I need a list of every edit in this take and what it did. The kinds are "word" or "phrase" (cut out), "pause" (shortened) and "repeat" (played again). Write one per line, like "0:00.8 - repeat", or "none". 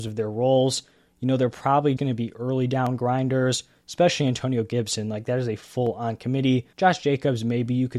0:02.0 - word
0:06.7 - pause